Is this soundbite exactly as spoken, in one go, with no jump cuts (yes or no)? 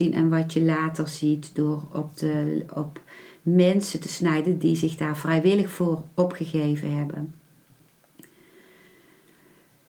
yes